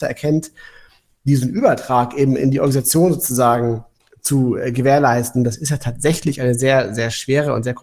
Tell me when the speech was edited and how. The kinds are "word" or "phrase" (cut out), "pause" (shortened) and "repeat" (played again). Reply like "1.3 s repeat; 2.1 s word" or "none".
none

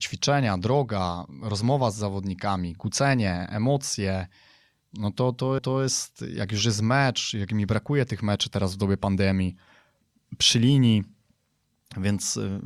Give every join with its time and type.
5.6 s repeat

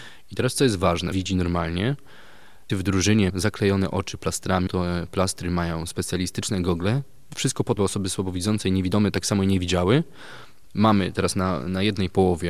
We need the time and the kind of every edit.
1.1 s word; 2.7 s word; 3.3 s word; 4.7 s word; 7.8 s word; 10.7 s word

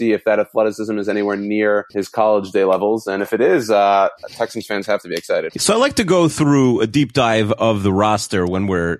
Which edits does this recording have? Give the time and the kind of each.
1.9 s pause

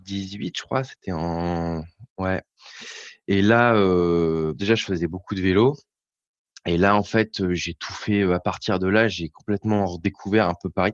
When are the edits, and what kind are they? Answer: 4.6 s word

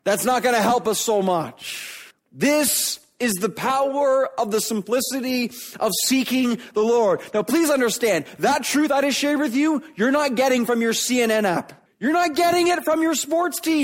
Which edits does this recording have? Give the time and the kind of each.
2.1 s pause; 11.9 s pause

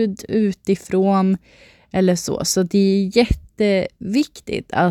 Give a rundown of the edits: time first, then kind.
none

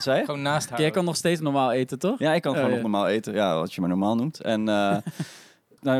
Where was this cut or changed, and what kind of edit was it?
none

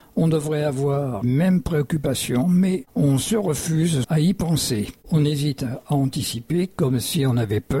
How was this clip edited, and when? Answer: 1.2 s word; 4.0 s word

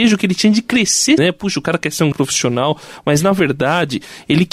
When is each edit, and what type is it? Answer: 1.2 s word; 2.1 s word

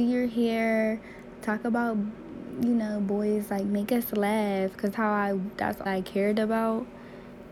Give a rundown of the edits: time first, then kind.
4.9 s word; 5.9 s word

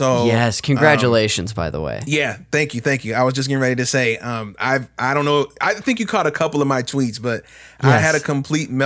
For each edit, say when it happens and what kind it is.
none

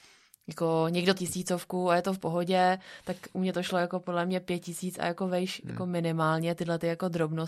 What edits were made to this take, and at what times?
1.2 s phrase

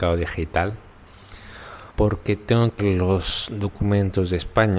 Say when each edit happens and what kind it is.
1.9 s pause; 2.8 s word

